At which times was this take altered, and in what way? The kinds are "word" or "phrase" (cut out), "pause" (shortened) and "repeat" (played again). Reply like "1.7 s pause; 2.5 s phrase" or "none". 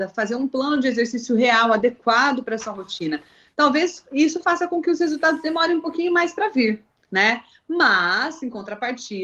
none